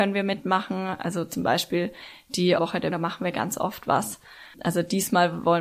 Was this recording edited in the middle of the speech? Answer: yes; 2 cuts; at 2.6 s, 2.9 s

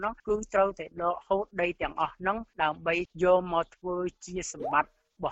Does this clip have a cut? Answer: yes; 1 cut; at 2.5 s

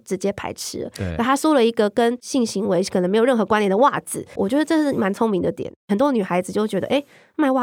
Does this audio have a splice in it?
yes; 1 cut; at 4.4 s

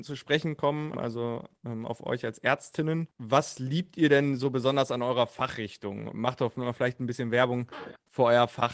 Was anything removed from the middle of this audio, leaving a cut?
yes; 1 cut; at 3.1 s

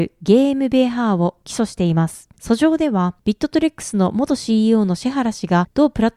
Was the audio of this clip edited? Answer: no; 0 cuts

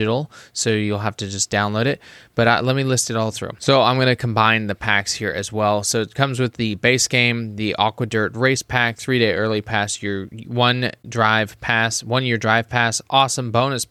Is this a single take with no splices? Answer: yes; 0 cuts

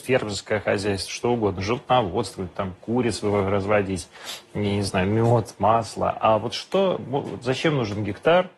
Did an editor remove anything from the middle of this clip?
no; 0 cuts

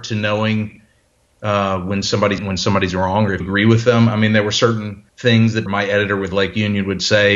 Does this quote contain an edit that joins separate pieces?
yes; 4 cuts; at 2.4 s, 3.4 s, 5.1 s, 5.7 s

